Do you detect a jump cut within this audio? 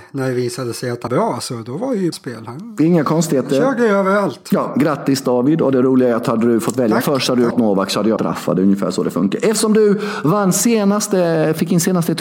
yes; 4 cuts; at 1.1 s, 2.1 s, 7.5 s, 8.2 s

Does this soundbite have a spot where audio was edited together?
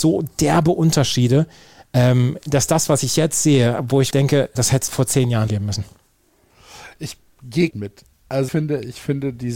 yes; 6 cuts; at 4.1 s, 4.5 s, 4.9 s, 5.5 s, 7.7 s, 8.5 s

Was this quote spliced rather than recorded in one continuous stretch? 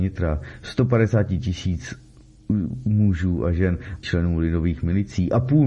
yes; 1 cut; at 4.0 s

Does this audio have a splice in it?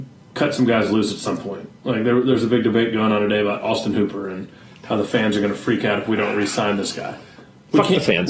no; 0 cuts

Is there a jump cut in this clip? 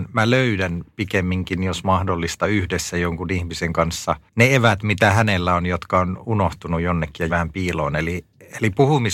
yes; 2 cuts; at 4.3 s, 7.3 s

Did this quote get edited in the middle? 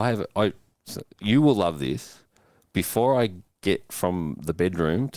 no; 0 cuts

